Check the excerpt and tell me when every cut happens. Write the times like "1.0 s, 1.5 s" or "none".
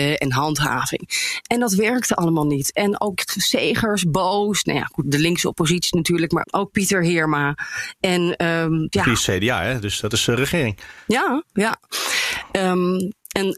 5.0 s, 6.4 s, 8.9 s